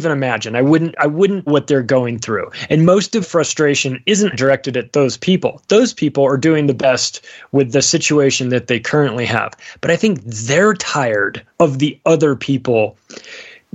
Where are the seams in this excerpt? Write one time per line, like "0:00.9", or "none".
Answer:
0:01.5
0:03.2
0:04.3
0:11.5